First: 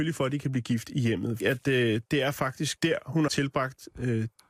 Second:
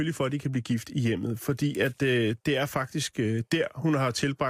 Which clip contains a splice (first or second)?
first